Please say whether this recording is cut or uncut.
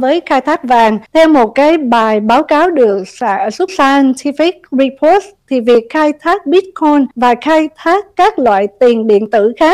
cut